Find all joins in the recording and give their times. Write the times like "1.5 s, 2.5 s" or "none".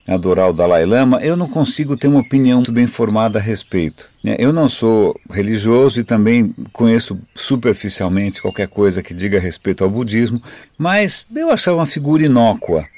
2.6 s, 4.1 s, 10.6 s